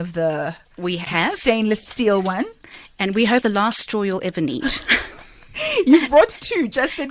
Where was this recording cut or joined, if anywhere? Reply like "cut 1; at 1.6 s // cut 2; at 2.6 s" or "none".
cut 1; at 1.1 s // cut 2; at 3.4 s